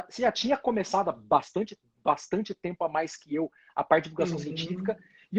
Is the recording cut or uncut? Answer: uncut